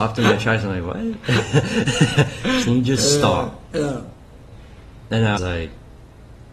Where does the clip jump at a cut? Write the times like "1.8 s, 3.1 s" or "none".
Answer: 2.6 s, 5.4 s